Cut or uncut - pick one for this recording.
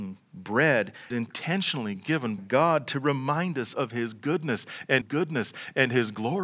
cut